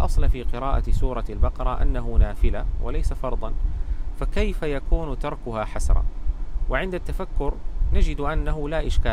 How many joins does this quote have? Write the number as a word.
zero